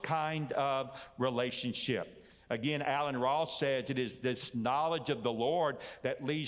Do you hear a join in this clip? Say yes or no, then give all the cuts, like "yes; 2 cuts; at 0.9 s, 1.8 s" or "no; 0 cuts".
no; 0 cuts